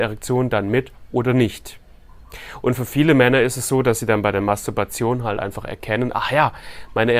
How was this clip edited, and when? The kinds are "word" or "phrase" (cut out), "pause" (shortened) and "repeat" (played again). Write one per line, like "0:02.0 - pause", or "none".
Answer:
none